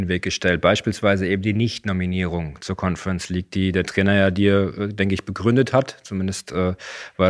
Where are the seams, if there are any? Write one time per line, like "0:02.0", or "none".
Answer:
none